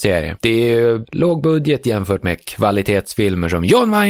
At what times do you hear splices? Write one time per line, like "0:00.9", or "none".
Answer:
none